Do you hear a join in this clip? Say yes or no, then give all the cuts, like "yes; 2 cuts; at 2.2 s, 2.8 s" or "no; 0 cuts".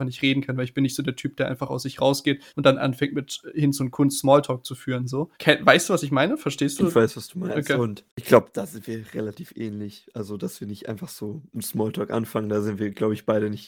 yes; 3 cuts; at 2.5 s, 5.3 s, 8.1 s